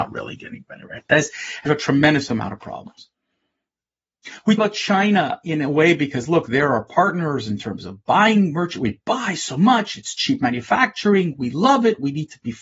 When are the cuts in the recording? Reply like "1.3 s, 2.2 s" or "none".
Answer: 1.7 s, 4.6 s